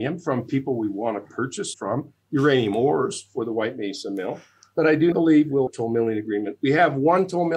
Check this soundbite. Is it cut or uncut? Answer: cut